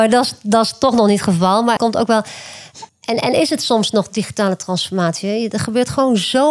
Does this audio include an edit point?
yes; 2 cuts; at 1.8 s, 2.9 s

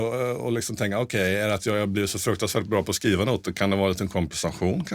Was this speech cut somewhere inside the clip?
no; 0 cuts

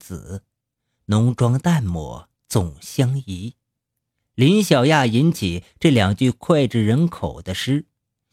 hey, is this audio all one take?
no; 1 cut; at 2.3 s

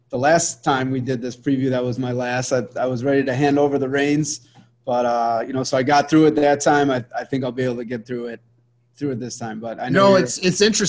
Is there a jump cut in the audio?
no; 0 cuts

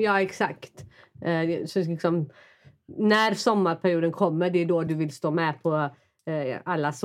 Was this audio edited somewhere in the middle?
no; 0 cuts

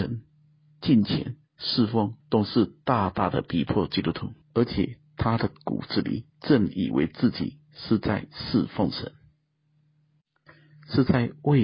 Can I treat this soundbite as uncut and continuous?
no; 3 cuts; at 2.2 s, 4.4 s, 6.3 s

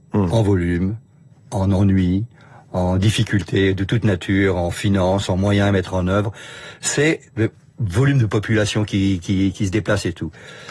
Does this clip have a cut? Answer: no; 0 cuts

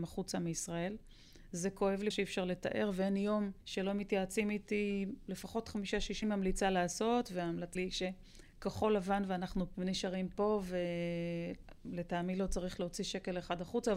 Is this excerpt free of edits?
no; 5 cuts; at 2.1 s, 3.6 s, 6.2 s, 7.8 s, 9.7 s

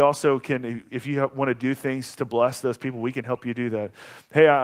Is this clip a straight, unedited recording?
yes; 0 cuts

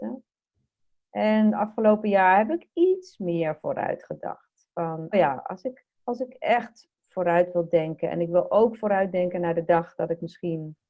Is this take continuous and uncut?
no; 2 cuts; at 5.1 s, 5.9 s

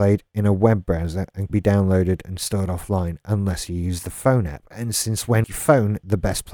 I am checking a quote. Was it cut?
yes; 2 cuts; at 1.5 s, 5.4 s

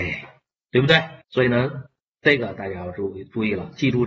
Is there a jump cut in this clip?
yes; 2 cuts; at 1.2 s, 2.0 s

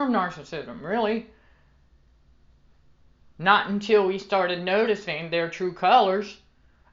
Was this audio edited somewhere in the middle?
no; 0 cuts

